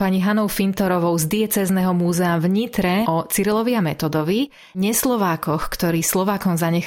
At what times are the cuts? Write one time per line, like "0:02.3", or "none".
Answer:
0:03.0